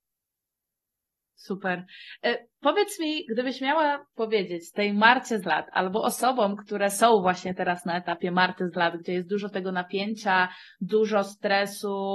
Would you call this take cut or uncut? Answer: cut